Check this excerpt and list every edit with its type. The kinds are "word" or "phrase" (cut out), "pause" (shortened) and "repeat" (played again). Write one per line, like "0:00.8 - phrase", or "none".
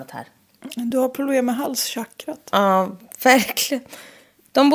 none